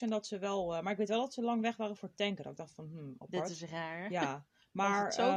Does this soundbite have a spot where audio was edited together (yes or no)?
no